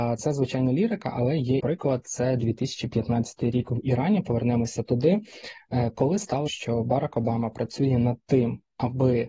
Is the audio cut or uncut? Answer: cut